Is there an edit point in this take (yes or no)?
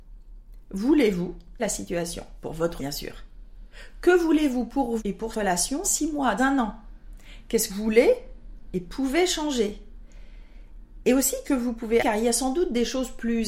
yes